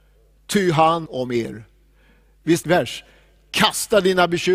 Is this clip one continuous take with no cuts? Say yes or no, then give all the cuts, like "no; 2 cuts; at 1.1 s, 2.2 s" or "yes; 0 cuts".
no; 2 cuts; at 1.1 s, 2.6 s